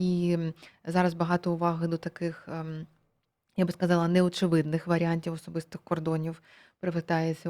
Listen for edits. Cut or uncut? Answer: uncut